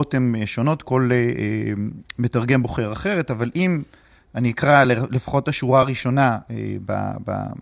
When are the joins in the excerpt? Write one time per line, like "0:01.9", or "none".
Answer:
none